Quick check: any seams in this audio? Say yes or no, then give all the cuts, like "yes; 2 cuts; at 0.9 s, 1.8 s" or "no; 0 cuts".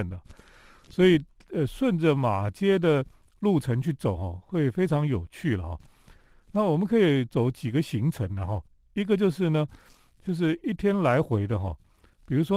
no; 0 cuts